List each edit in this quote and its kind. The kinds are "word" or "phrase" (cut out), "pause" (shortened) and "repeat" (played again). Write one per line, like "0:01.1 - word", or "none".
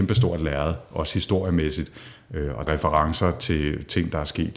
0:02.7 - phrase